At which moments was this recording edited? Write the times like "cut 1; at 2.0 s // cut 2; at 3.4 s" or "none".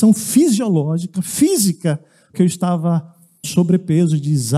cut 1; at 2.3 s // cut 2; at 3.4 s